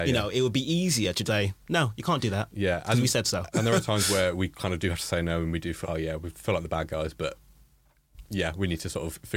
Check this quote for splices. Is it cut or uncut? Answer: cut